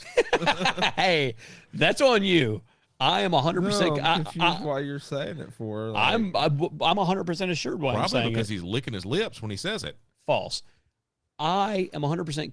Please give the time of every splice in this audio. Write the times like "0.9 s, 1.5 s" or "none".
none